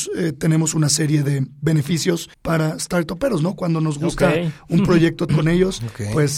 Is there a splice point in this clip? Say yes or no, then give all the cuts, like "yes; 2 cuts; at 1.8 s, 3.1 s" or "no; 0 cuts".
yes; 2 cuts; at 2.3 s, 5.3 s